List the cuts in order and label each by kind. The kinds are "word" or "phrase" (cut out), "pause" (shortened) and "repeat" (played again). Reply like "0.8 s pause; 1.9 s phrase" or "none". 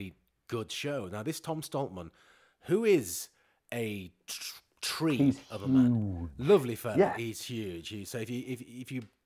none